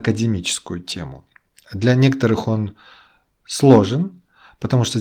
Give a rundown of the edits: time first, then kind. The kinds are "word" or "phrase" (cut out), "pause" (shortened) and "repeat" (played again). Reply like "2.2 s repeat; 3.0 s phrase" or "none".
none